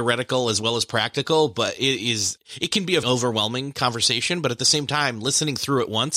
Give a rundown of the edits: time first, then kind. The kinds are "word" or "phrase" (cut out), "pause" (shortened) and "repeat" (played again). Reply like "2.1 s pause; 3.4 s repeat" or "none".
3.0 s word